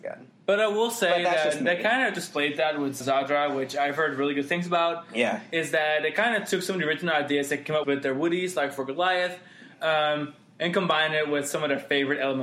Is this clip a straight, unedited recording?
no; 2 cuts; at 3.0 s, 7.8 s

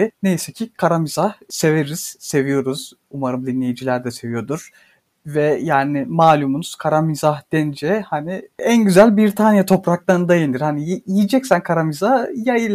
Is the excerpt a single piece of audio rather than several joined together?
yes; 0 cuts

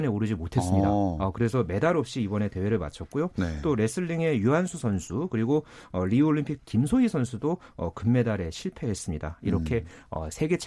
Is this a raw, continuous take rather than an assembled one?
no; 1 cut; at 6.6 s

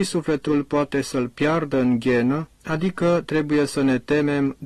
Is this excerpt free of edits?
no; 1 cut; at 2.5 s

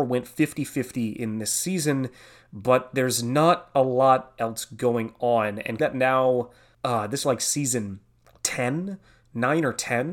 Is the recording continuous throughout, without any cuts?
no; 2 cuts; at 5.8 s, 7.2 s

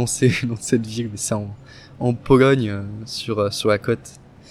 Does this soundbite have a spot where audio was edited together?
no; 0 cuts

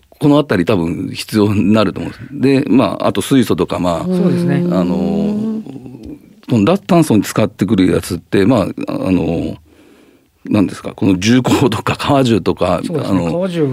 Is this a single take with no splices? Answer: yes; 0 cuts

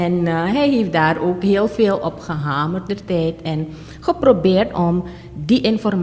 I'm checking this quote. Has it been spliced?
yes; 1 cut; at 2.9 s

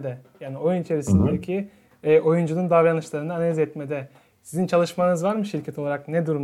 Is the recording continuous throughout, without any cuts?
yes; 0 cuts

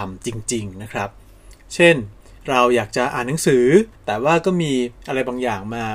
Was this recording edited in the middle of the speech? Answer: yes; 2 cuts; at 2.4 s, 4.0 s

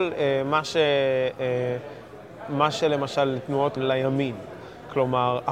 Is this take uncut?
no; 1 cut; at 3.8 s

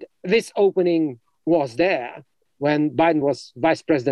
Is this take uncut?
yes; 0 cuts

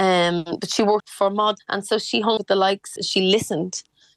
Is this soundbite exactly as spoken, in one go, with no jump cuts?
no; 4 cuts; at 1.0 s, 1.6 s, 2.4 s, 3.0 s

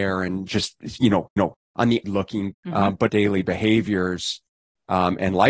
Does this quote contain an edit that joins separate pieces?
yes; 4 cuts; at 1.4 s, 2.0 s, 2.5 s, 3.1 s

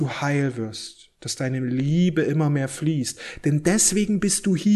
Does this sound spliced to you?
no; 0 cuts

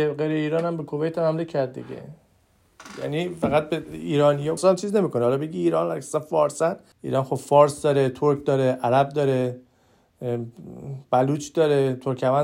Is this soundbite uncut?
no; 2 cuts; at 4.6 s, 6.9 s

